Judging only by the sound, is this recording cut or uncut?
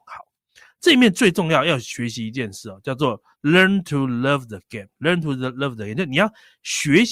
cut